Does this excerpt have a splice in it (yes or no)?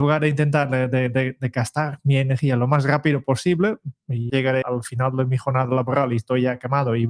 yes